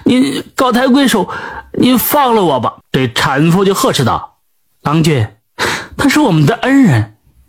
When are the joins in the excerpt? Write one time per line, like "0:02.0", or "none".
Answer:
0:02.8
0:04.4

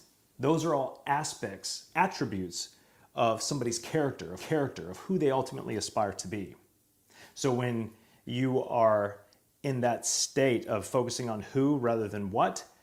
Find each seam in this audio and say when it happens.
0:04.4

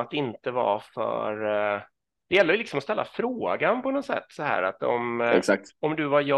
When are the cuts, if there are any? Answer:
none

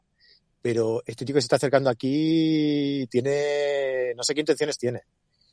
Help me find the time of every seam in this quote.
none

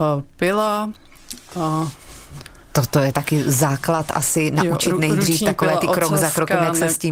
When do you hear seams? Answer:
none

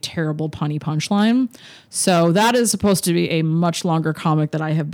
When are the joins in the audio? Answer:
none

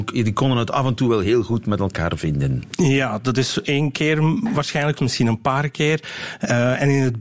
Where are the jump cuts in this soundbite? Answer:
0:04.9

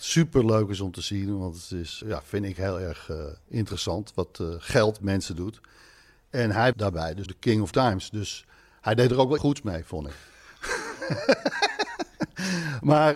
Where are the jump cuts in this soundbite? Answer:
0:02.0
0:05.0
0:06.7
0:07.3
0:07.7
0:09.4

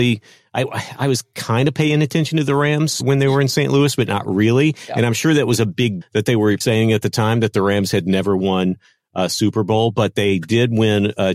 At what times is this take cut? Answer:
0:03.0
0:06.0
0:06.6

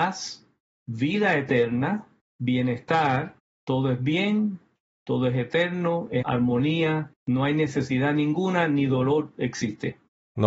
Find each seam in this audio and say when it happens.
0:06.2

